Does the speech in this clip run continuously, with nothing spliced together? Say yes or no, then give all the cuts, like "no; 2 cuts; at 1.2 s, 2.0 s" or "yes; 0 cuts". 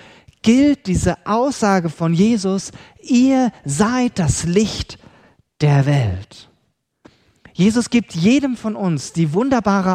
yes; 0 cuts